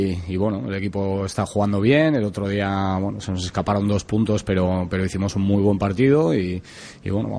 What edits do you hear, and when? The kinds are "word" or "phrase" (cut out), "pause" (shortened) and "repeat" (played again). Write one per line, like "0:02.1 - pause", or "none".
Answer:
none

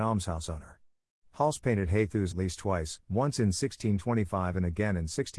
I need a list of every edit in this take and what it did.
0:02.3 - word
0:03.0 - pause

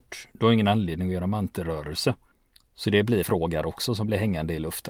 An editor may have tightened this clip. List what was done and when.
0:02.3 - pause
0:03.2 - word
0:03.6 - word

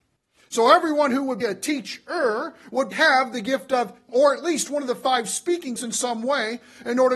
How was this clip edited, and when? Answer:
0:01.4 - word
0:02.9 - word
0:04.1 - word
0:05.8 - word

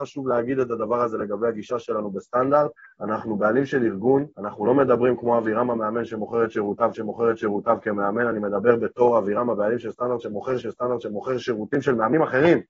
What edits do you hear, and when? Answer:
0:02.8 - pause
0:04.3 - pause
0:06.9 - repeat
0:10.6 - repeat

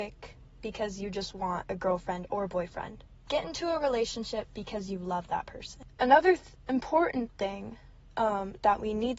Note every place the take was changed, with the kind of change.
none

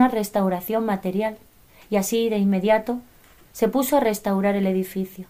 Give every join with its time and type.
none

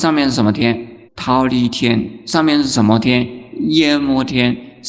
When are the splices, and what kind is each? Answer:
0:01.0 - pause

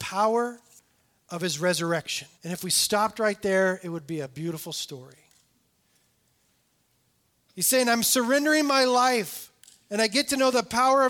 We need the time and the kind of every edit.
0:02.3 - pause

